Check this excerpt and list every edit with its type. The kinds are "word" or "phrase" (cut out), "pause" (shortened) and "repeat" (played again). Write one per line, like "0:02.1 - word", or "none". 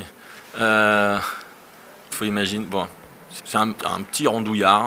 0:02.1 - word
0:03.4 - word
0:03.8 - word